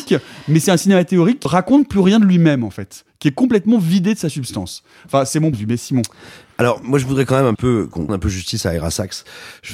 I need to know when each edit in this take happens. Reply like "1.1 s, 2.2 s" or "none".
1.5 s, 5.5 s, 7.6 s, 8.1 s